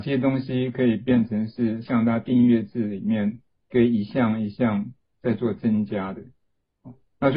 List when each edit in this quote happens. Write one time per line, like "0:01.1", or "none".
none